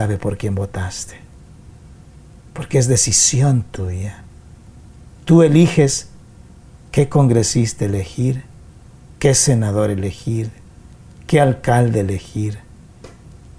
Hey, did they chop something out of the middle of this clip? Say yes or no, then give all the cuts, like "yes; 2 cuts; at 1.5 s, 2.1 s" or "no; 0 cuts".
no; 0 cuts